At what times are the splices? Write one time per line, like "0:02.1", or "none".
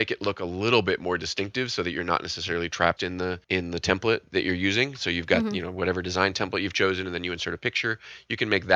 0:03.0
0:03.4